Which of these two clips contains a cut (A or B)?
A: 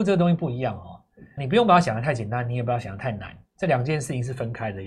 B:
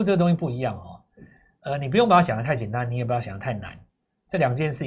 A